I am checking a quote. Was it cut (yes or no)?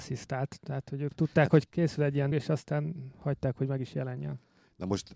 yes